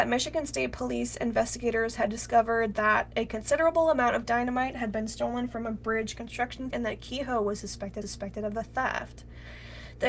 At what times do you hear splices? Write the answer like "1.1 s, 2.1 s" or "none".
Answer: 6.7 s, 8.0 s